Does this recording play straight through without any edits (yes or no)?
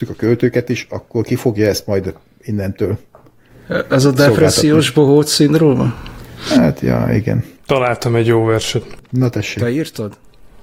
no